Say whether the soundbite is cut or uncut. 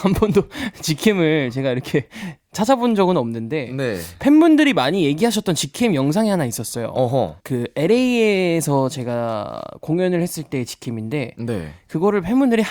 cut